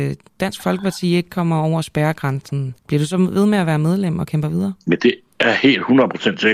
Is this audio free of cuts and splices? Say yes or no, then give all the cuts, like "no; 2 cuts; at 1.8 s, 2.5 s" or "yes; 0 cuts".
no; 1 cut; at 2.8 s